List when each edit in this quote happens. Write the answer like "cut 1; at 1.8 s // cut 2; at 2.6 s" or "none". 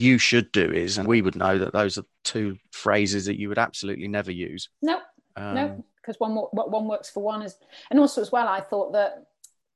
cut 1; at 1.0 s // cut 2; at 2.6 s // cut 3; at 4.7 s // cut 4; at 5.9 s